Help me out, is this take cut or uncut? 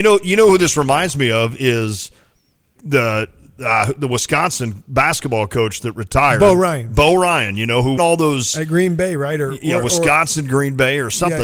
cut